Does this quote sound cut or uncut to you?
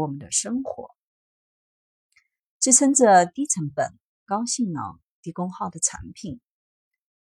uncut